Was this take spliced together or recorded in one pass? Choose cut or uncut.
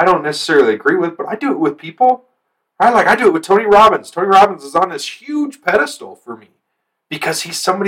uncut